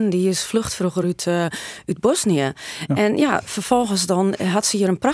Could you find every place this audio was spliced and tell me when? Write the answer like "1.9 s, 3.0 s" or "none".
none